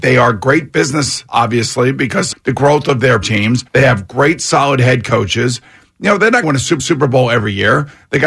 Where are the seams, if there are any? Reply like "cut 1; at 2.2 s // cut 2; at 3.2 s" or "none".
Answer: cut 1; at 1.3 s // cut 2; at 2.3 s // cut 3; at 3.2 s // cut 4; at 3.7 s // cut 5; at 6.4 s // cut 6; at 6.8 s